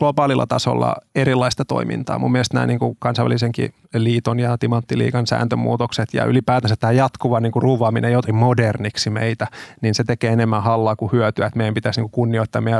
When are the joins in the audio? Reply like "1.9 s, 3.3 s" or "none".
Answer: 1.1 s, 3.8 s, 8.3 s